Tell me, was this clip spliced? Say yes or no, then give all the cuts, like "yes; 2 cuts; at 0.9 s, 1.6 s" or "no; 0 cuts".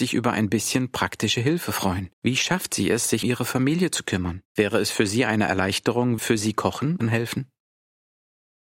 yes; 5 cuts; at 2.1 s, 3.2 s, 4.5 s, 6.2 s, 7.0 s